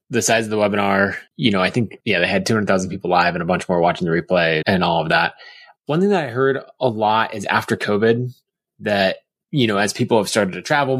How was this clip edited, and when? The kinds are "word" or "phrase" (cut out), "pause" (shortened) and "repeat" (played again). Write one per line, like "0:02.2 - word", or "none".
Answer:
0:04.6 - word